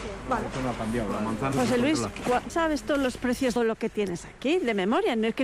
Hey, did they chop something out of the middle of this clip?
yes; 3 cuts; at 1.5 s, 2.5 s, 3.6 s

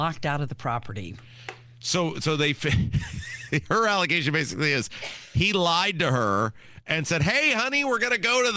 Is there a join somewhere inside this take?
no; 0 cuts

